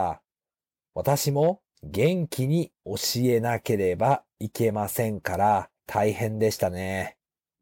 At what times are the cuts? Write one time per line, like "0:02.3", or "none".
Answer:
0:05.8